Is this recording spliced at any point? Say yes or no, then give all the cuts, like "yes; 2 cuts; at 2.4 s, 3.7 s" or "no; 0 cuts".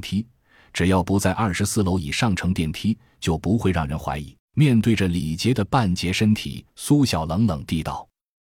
yes; 2 cuts; at 4.4 s, 6.7 s